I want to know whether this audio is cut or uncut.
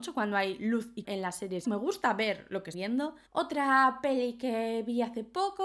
cut